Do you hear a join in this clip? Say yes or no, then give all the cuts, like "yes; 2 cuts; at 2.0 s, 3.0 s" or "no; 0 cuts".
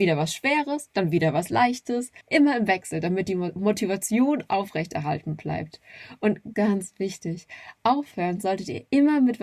yes; 2 cuts; at 2.2 s, 6.5 s